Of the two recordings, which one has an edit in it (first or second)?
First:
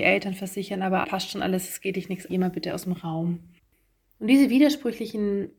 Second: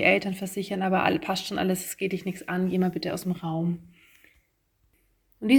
first